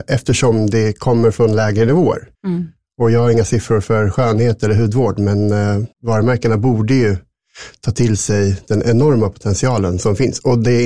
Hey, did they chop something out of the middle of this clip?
yes; 2 cuts; at 2.3 s, 5.9 s

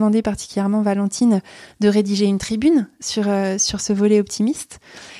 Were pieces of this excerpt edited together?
no; 0 cuts

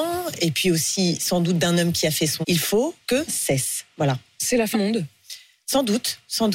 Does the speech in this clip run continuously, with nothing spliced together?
no; 3 cuts; at 2.4 s, 3.3 s, 4.7 s

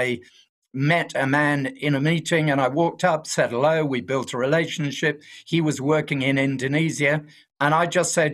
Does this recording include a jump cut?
no; 0 cuts

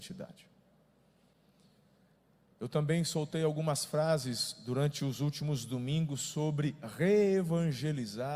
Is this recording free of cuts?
yes; 0 cuts

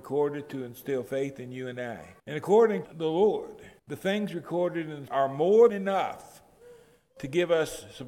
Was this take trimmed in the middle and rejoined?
yes; 5 cuts; at 2.2 s, 2.8 s, 3.8 s, 5.1 s, 5.7 s

